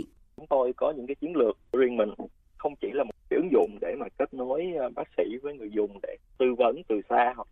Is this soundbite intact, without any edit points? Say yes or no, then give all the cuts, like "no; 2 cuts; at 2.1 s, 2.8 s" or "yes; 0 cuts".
yes; 0 cuts